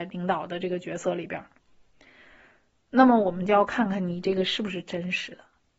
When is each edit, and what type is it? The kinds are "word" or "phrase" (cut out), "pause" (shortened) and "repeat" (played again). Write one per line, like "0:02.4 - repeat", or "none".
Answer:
none